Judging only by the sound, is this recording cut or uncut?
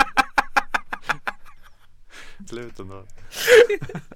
cut